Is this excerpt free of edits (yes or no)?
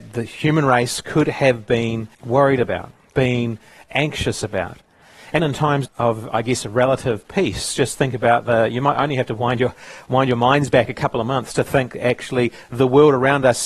no